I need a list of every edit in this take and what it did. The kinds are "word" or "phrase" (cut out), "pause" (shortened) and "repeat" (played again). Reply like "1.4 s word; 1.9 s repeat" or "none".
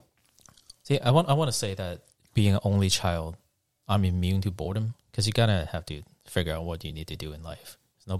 none